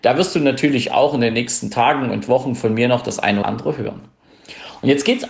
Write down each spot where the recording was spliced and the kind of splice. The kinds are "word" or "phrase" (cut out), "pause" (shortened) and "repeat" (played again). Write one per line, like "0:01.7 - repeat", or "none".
0:03.4 - word